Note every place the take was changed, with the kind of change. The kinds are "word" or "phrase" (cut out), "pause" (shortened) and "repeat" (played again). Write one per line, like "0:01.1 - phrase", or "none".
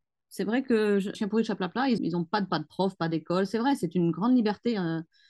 0:01.1 - word
0:02.0 - word
0:02.5 - word